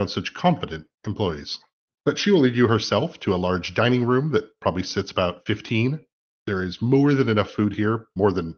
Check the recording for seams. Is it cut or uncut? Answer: uncut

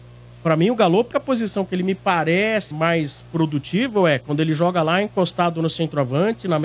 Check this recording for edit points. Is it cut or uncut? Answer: cut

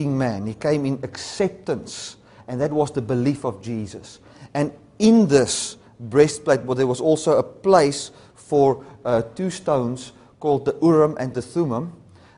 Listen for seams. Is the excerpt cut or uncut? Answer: uncut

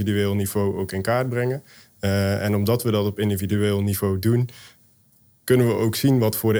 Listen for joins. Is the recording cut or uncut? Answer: uncut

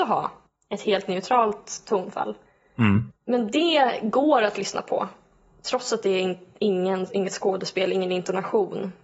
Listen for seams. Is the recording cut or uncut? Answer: uncut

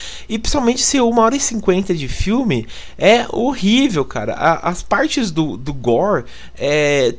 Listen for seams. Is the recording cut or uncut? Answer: uncut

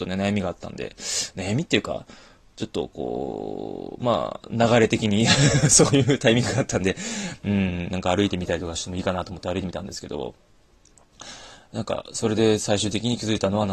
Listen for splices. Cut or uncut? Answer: uncut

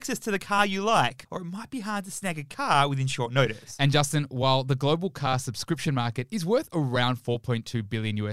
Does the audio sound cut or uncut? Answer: uncut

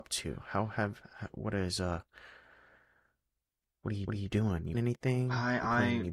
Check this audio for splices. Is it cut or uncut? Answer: cut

